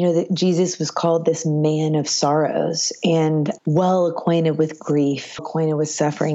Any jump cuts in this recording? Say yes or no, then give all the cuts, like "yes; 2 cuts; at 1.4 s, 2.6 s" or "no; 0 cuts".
yes; 2 cuts; at 3.6 s, 5.4 s